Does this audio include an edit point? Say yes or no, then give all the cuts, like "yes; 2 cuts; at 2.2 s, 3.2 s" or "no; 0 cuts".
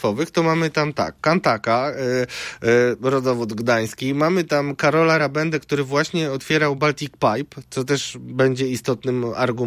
no; 0 cuts